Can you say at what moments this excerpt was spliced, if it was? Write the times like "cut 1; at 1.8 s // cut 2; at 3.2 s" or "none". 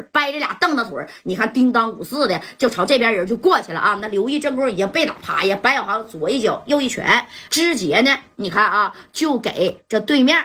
cut 1; at 7.5 s

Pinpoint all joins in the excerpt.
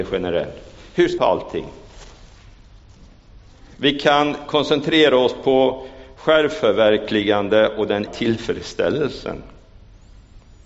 cut 1; at 1.2 s // cut 2; at 8.1 s

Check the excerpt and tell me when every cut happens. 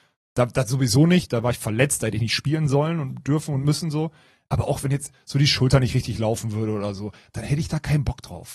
none

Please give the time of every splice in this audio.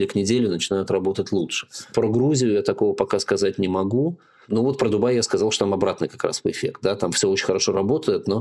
none

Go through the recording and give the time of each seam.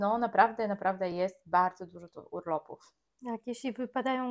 none

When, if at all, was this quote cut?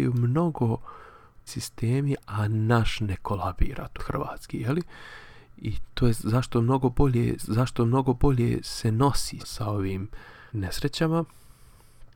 cut 1; at 1.5 s // cut 2; at 4.0 s // cut 3; at 7.4 s // cut 4; at 9.4 s // cut 5; at 10.5 s

